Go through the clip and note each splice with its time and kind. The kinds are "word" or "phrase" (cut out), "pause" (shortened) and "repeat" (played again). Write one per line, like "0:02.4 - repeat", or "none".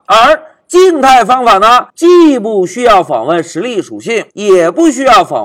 0:01.9 - pause
0:04.3 - pause